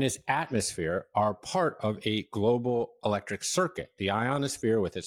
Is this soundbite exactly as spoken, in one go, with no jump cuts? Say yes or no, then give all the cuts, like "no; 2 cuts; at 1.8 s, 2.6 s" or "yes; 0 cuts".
yes; 0 cuts